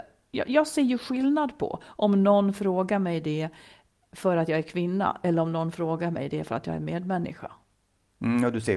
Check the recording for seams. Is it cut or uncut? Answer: uncut